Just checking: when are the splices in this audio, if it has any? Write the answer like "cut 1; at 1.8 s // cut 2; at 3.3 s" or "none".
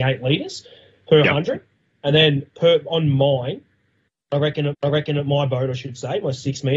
cut 1; at 2.5 s // cut 2; at 4.7 s